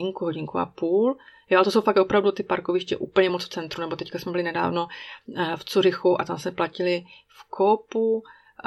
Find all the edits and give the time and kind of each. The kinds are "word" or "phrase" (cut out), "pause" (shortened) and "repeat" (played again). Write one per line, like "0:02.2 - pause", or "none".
none